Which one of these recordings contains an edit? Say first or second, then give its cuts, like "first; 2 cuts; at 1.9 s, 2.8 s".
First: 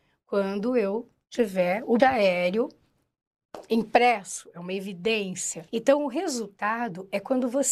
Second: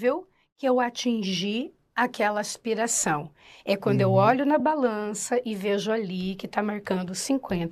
first; 2 cuts; at 2.0 s, 5.7 s